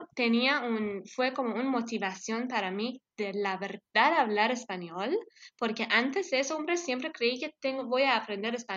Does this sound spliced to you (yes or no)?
no